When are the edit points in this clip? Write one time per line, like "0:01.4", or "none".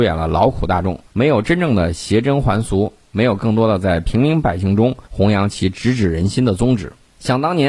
0:01.1
0:05.1